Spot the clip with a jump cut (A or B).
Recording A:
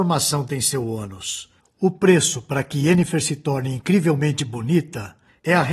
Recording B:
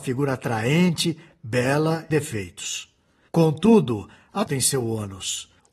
B